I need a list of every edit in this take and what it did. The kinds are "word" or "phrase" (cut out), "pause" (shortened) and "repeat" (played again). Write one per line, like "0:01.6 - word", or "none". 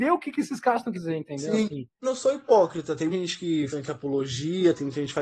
0:00.9 - word
0:02.0 - word
0:03.1 - word
0:03.7 - word